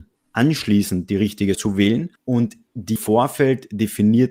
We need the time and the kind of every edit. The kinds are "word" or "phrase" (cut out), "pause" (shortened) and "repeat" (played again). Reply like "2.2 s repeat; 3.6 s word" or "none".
1.5 s word; 2.2 s pause; 3.0 s word